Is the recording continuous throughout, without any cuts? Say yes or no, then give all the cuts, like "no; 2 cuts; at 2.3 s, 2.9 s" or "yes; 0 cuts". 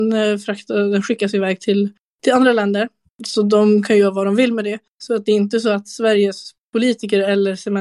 yes; 0 cuts